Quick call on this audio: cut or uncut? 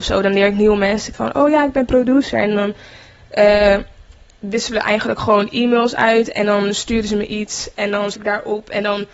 cut